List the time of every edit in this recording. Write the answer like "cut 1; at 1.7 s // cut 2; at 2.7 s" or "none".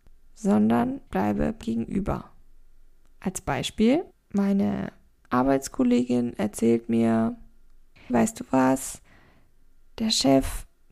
cut 1; at 1.1 s // cut 2; at 1.6 s // cut 3; at 4.1 s // cut 4; at 8.1 s